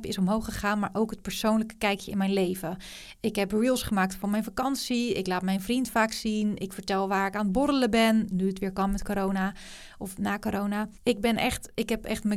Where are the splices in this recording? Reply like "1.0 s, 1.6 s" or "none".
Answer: 11.0 s